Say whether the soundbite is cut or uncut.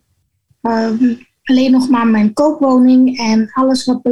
uncut